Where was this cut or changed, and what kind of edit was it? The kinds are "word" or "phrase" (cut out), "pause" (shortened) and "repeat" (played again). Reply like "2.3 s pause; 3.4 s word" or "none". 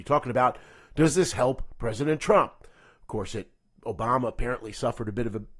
none